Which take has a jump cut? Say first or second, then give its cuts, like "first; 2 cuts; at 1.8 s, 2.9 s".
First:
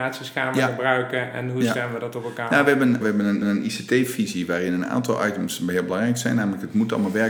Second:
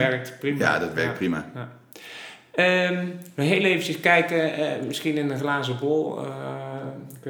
first; 2 cuts; at 3.0 s, 3.4 s